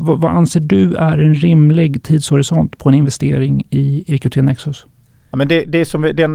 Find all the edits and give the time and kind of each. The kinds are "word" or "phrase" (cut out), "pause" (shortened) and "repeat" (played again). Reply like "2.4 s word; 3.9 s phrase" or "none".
none